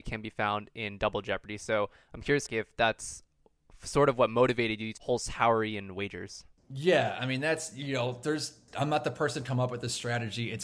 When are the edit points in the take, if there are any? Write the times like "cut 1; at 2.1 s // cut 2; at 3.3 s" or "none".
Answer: cut 1; at 2.5 s // cut 2; at 5.0 s